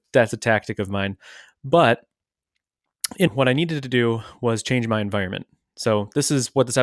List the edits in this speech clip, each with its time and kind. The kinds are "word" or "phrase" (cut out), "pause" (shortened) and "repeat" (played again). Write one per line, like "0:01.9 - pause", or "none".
0:03.3 - word